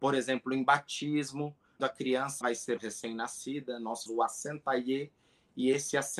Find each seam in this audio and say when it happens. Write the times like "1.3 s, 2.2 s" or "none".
1.8 s, 2.4 s, 2.8 s, 4.1 s